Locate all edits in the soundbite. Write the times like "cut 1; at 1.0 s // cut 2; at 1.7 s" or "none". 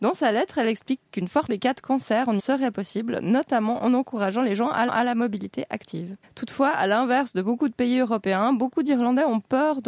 cut 1; at 1.5 s // cut 2; at 2.4 s // cut 3; at 4.9 s // cut 4; at 6.2 s